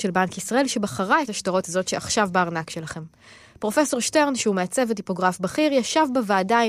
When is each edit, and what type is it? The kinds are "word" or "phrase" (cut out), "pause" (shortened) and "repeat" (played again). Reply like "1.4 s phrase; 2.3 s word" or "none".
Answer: 1.3 s word; 1.6 s word